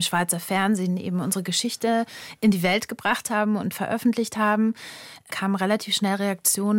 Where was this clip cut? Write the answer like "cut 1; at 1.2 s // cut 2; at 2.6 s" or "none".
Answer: none